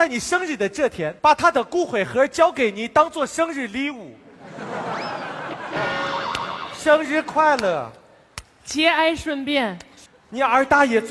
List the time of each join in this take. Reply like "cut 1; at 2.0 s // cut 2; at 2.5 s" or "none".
cut 1; at 1.2 s // cut 2; at 10.1 s